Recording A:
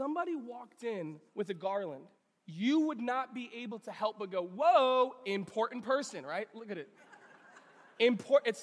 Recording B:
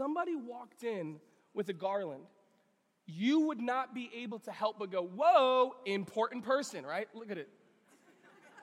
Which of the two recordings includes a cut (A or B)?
A